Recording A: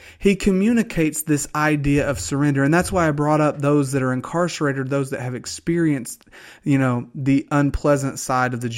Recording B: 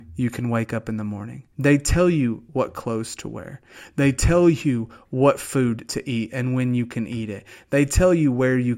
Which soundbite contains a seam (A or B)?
B